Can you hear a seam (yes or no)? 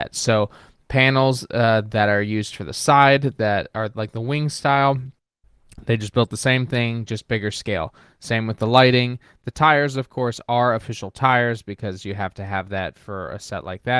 no